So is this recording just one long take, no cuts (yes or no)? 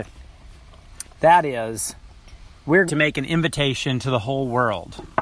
no